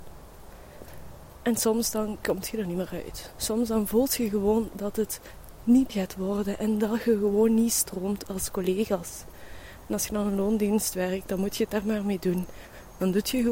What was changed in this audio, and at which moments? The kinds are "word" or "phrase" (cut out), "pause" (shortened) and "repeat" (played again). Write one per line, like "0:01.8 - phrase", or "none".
0:05.9 - word